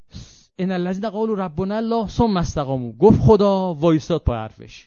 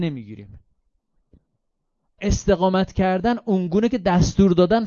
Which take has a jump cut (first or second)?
second